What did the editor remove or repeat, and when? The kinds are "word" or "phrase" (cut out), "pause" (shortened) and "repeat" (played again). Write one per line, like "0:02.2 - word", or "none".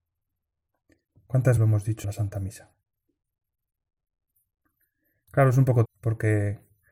0:01.6 - word
0:02.0 - word
0:05.8 - word